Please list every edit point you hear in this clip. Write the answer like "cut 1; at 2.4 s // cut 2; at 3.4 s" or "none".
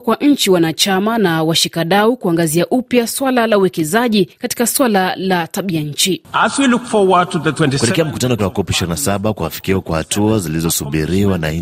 cut 1; at 8.4 s